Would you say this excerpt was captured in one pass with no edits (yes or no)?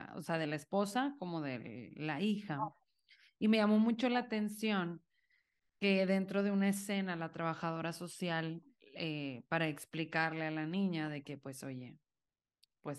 yes